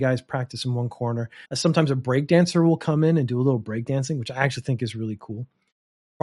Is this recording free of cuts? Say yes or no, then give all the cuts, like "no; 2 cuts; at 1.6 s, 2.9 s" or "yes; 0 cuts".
no; 1 cut; at 1.4 s